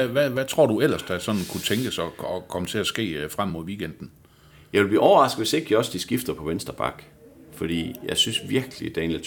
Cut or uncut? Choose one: uncut